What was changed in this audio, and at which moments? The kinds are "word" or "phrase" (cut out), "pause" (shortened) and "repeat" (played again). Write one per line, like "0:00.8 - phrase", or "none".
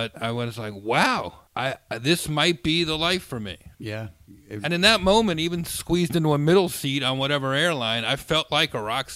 0:01.5 - pause
0:03.7 - pause